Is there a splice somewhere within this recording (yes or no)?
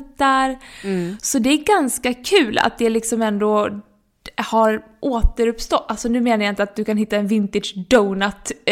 no